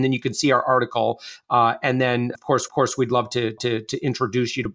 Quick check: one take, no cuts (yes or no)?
no